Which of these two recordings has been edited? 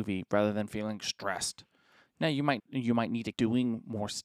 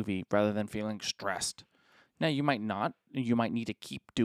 first; 2 cuts; at 2.6 s, 3.3 s

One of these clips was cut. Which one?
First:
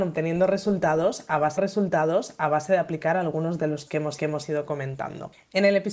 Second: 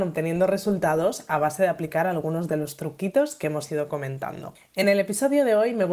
first; 3 cuts; at 1.6 s, 3.9 s, 4.2 s

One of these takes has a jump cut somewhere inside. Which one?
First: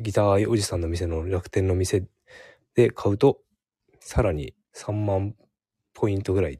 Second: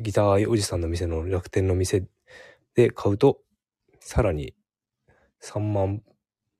first; 1 cut; at 4.6 s

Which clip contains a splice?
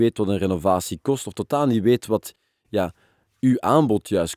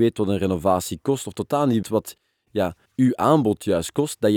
second; 2 cuts; at 1.8 s, 2.8 s

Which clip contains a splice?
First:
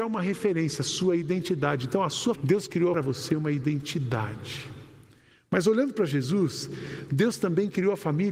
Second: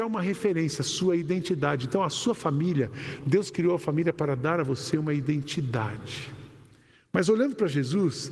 first; 2 cuts; at 2.4 s, 2.9 s

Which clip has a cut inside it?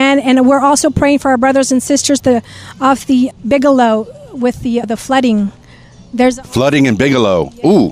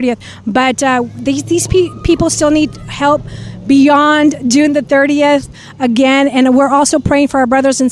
first; 3 cuts; at 2.2 s, 3.3 s, 4.8 s

